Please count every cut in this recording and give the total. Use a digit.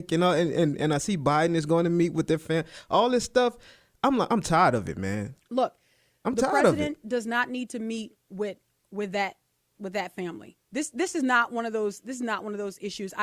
0